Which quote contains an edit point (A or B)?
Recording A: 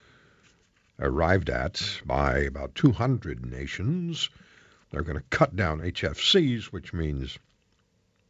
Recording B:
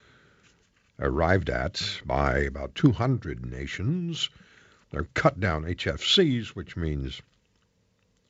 B